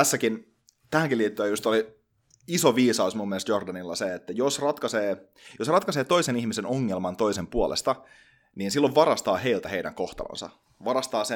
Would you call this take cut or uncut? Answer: uncut